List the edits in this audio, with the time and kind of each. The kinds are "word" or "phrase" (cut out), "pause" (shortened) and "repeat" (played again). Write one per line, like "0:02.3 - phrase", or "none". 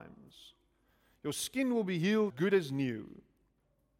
0:02.3 - phrase